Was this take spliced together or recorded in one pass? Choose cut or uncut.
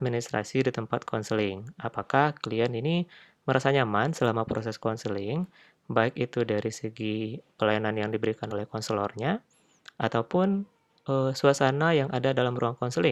uncut